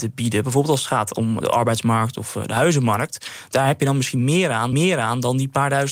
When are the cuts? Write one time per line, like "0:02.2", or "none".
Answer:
0:01.4
0:04.7